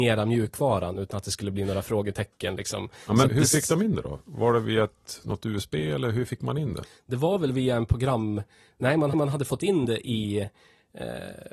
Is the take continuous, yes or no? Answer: no